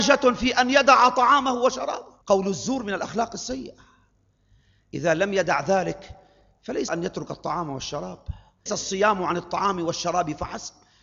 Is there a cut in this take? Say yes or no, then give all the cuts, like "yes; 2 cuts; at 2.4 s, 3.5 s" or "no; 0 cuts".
yes; 3 cuts; at 2.2 s, 6.9 s, 8.7 s